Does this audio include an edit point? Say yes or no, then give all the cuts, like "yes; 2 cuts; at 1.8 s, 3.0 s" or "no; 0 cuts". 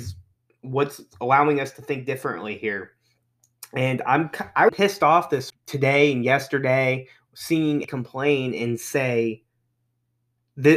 yes; 3 cuts; at 4.7 s, 5.5 s, 7.8 s